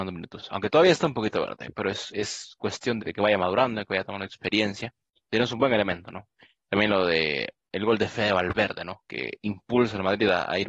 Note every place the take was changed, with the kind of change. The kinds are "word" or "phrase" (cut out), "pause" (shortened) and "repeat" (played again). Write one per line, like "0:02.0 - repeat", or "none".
0:03.0 - word